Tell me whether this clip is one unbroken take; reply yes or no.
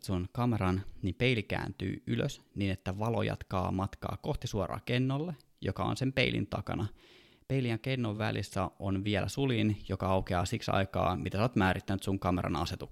yes